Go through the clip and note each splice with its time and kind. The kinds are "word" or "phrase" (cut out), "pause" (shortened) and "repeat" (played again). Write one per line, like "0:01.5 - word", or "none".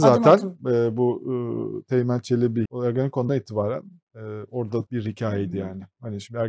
0:02.7 - word
0:03.3 - word
0:04.9 - word